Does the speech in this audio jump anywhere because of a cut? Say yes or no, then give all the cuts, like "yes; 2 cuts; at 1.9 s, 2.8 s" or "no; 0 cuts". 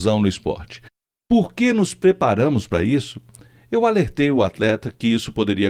no; 0 cuts